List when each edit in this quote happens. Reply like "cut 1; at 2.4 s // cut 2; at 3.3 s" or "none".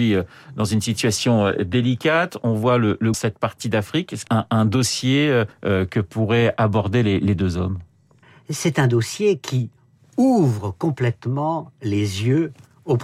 cut 1; at 3.1 s // cut 2; at 4.3 s // cut 3; at 5.5 s // cut 4; at 8.2 s

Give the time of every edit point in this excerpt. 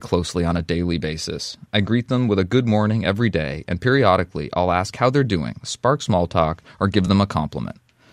none

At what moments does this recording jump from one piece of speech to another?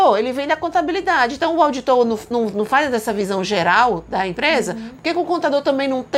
none

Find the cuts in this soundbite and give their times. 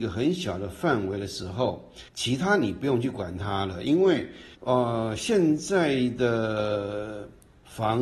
cut 1; at 2.1 s // cut 2; at 4.5 s

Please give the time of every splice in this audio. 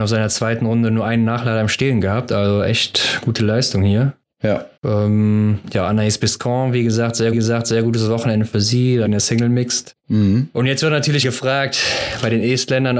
cut 1; at 4.8 s // cut 2; at 7.3 s // cut 3; at 9.1 s // cut 4; at 11.2 s

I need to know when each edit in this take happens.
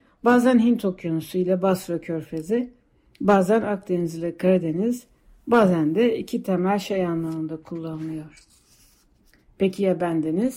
none

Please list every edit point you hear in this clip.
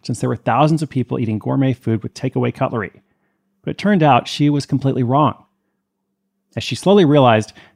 none

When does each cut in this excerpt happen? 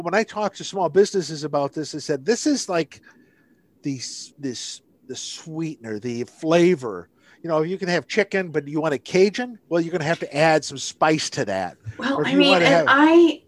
cut 1; at 4.3 s // cut 2; at 9.6 s

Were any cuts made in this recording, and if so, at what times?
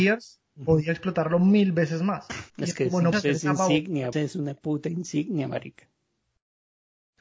cut 1; at 2.5 s // cut 2; at 3.1 s // cut 3; at 4.1 s

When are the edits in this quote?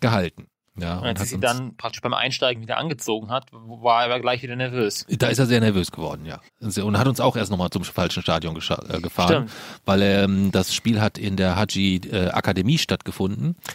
cut 1; at 6.5 s

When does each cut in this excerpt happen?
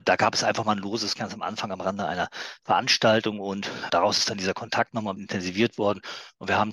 cut 1; at 1.1 s // cut 2; at 3.9 s // cut 3; at 5.2 s

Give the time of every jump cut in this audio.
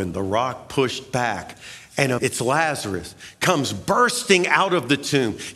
cut 1; at 2.2 s

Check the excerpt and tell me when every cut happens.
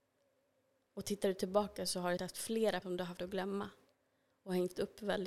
cut 1; at 2.2 s // cut 2; at 2.8 s // cut 3; at 3.2 s

